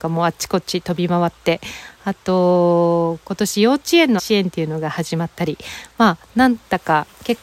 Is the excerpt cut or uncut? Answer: cut